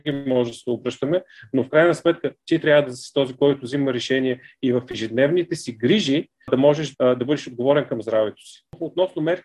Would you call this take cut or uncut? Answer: uncut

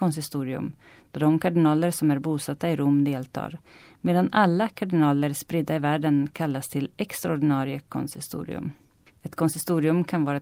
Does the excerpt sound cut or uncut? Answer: uncut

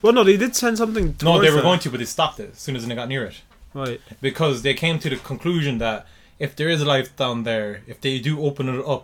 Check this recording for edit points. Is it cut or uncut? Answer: uncut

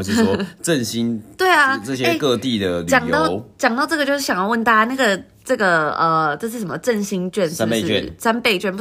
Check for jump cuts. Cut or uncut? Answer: uncut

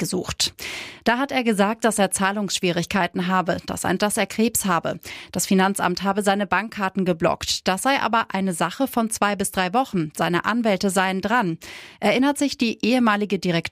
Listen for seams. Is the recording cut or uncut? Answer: cut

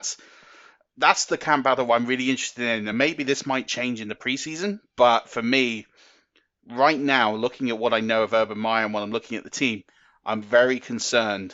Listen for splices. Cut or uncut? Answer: uncut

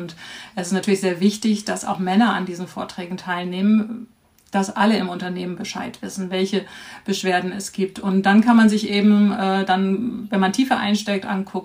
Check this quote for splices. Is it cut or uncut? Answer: uncut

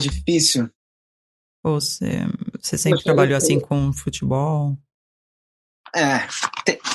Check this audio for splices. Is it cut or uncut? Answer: uncut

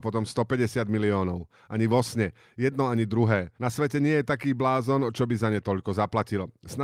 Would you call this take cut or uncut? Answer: cut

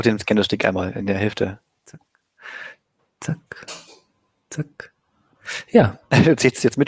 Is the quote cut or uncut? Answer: uncut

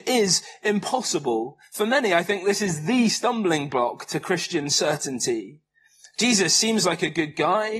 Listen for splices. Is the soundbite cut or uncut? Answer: uncut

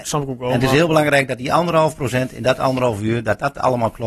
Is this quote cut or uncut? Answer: uncut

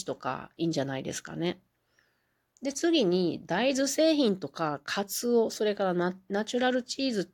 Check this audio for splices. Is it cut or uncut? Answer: uncut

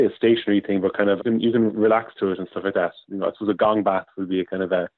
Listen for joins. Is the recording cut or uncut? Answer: cut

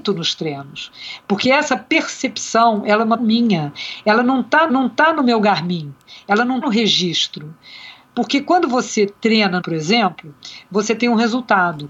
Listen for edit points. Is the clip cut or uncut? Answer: cut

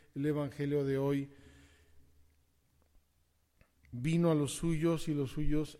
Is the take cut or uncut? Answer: uncut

